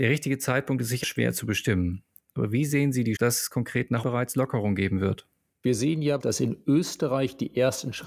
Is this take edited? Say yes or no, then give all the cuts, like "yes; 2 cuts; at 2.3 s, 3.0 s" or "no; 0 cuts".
yes; 4 cuts; at 1.0 s, 3.2 s, 4.0 s, 6.2 s